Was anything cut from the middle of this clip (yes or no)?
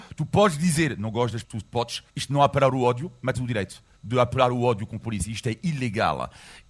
yes